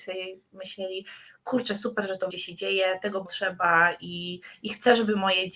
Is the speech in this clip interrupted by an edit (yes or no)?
yes